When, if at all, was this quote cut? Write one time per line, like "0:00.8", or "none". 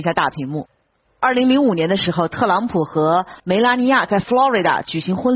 0:03.4